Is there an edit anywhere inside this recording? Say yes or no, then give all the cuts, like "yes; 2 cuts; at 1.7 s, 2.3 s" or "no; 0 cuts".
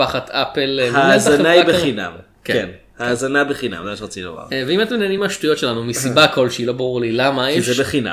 no; 0 cuts